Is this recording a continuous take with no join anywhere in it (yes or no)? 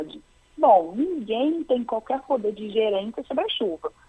yes